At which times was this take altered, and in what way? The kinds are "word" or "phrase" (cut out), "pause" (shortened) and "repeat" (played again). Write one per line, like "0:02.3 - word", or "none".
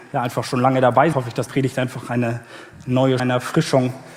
0:01.1 - word
0:01.5 - word
0:03.2 - word